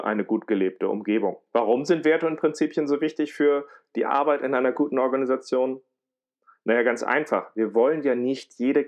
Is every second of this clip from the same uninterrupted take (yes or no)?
yes